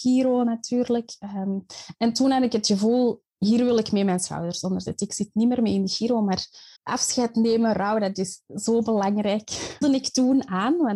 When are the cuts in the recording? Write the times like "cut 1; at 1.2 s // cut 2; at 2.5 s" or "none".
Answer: cut 1; at 3.3 s // cut 2; at 6.8 s // cut 3; at 9.8 s

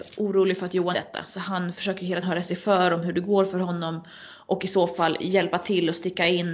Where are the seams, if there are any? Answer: cut 1; at 0.9 s // cut 2; at 2.2 s

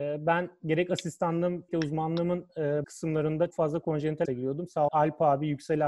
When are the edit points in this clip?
cut 1; at 1.7 s // cut 2; at 2.8 s // cut 3; at 3.5 s // cut 4; at 4.2 s // cut 5; at 4.9 s

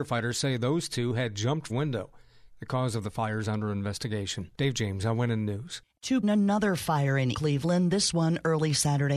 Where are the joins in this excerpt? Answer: cut 1; at 1.7 s // cut 2; at 4.5 s // cut 3; at 6.2 s // cut 4; at 7.3 s

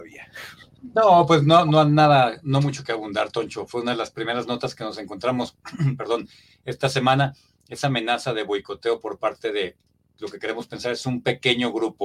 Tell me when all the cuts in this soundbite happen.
none

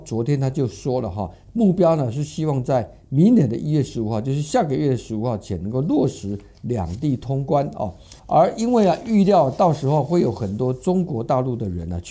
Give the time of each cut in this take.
cut 1; at 8.2 s

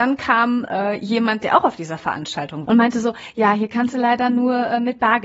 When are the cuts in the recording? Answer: cut 1; at 2.7 s

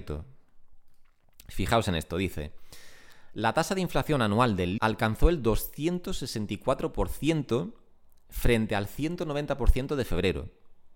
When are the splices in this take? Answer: cut 1; at 4.8 s

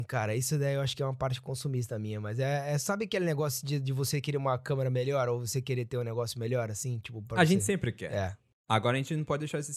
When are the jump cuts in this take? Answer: none

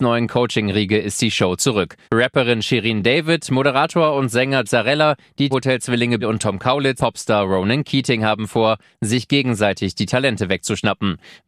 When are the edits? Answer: cut 1; at 2.0 s // cut 2; at 4.6 s // cut 3; at 5.5 s // cut 4; at 6.2 s // cut 5; at 7.0 s

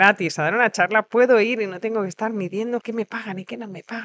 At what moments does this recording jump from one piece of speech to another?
none

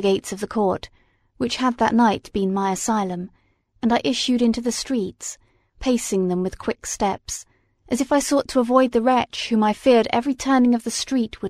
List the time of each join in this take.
none

